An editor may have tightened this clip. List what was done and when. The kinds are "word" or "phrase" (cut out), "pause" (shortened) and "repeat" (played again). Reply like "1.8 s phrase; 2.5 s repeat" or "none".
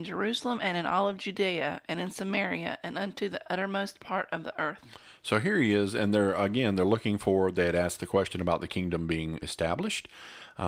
9.4 s word